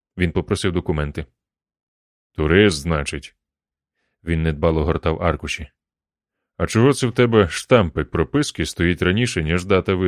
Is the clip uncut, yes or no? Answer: yes